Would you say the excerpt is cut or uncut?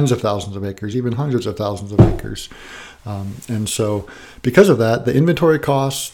uncut